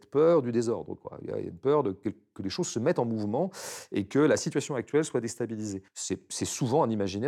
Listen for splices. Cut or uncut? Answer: cut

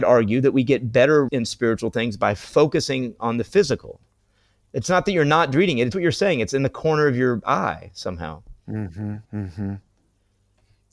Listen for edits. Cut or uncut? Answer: cut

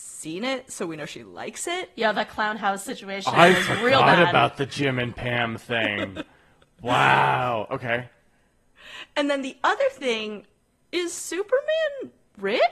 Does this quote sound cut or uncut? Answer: uncut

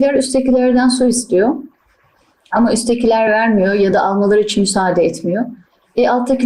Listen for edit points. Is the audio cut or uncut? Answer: uncut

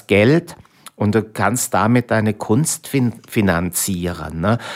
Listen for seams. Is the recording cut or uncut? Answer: uncut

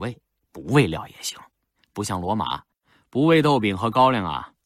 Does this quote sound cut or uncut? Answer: uncut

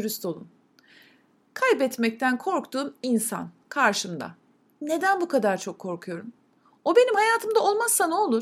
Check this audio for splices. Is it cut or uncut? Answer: uncut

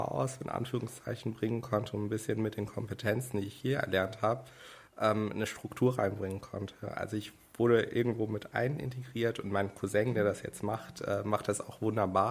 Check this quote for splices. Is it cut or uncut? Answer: uncut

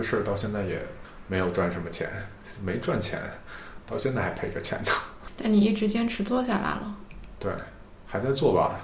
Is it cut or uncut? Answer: uncut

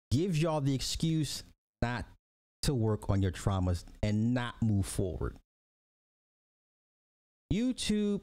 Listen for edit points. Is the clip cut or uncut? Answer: uncut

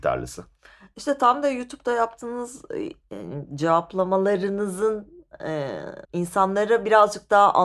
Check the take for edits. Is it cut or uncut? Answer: cut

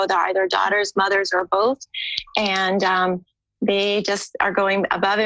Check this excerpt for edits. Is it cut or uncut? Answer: uncut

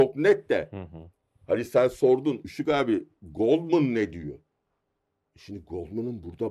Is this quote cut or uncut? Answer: uncut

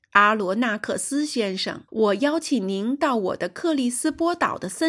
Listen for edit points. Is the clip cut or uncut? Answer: cut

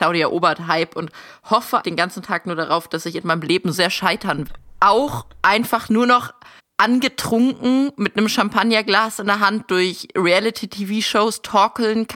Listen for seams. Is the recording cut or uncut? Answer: cut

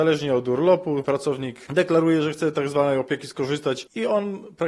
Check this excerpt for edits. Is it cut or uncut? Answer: uncut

